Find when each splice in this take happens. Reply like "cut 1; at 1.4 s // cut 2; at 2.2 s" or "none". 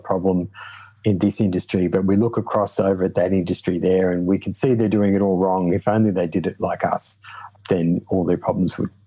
cut 1; at 0.9 s

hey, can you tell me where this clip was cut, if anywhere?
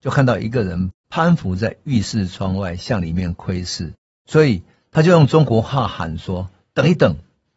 none

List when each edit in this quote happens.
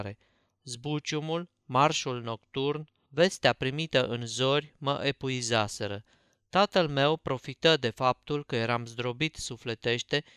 none

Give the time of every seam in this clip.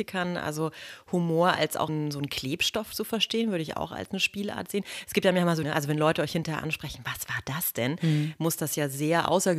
cut 1; at 1.9 s // cut 2; at 5.6 s

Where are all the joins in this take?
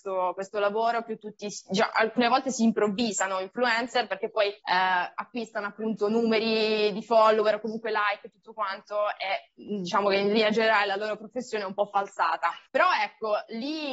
cut 1; at 4.6 s // cut 2; at 12.7 s

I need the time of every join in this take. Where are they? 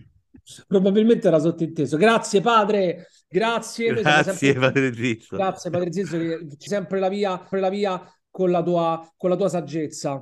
cut 1; at 6.7 s // cut 2; at 7.5 s

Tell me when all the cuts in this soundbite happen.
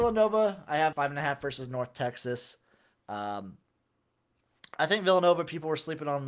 cut 1; at 0.9 s

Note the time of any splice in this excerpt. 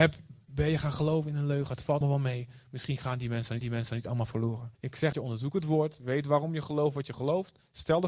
cut 1; at 2.0 s // cut 2; at 3.6 s // cut 3; at 4.7 s // cut 4; at 5.1 s

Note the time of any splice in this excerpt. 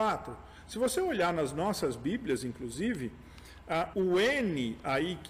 cut 1; at 3.9 s

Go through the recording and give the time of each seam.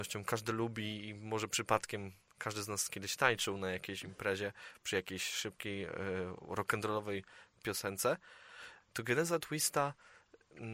none

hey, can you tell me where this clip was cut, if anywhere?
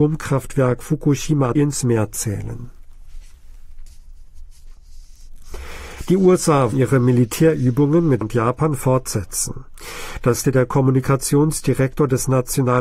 cut 1; at 1.6 s // cut 2; at 6.7 s // cut 3; at 8.2 s // cut 4; at 10.4 s

